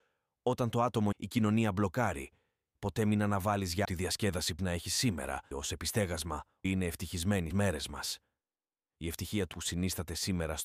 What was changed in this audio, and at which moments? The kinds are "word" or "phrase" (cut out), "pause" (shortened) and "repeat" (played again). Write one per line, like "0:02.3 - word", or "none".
0:01.1 - word
0:02.7 - word
0:03.8 - word
0:04.6 - word
0:05.5 - word
0:06.6 - word
0:07.5 - word
0:09.5 - word